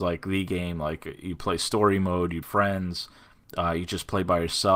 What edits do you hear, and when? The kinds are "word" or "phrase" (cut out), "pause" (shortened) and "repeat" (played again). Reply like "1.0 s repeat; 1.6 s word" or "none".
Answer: 2.4 s phrase